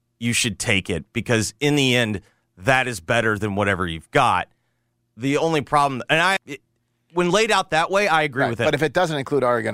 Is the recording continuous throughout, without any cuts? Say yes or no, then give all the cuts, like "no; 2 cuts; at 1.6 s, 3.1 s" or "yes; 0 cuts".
no; 1 cut; at 6.4 s